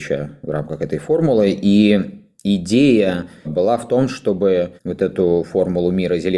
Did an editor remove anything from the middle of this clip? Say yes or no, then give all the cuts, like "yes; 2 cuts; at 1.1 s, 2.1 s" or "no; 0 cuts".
yes; 2 cuts; at 3.4 s, 4.8 s